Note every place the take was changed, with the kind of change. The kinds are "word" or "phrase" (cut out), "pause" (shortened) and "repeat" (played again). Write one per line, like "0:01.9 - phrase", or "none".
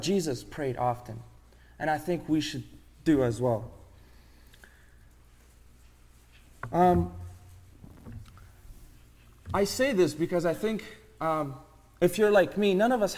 none